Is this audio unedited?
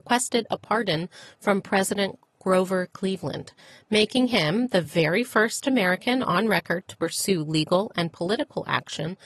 yes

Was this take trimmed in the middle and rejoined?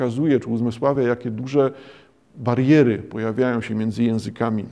no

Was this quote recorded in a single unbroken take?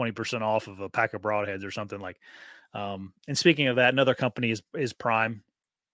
yes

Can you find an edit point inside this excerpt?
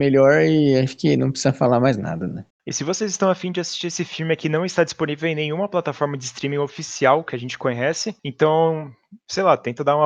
no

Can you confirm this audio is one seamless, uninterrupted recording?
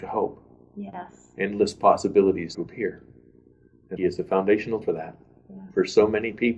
no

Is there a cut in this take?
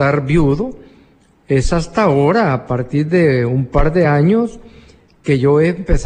no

